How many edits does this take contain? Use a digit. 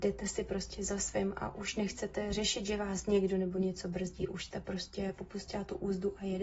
0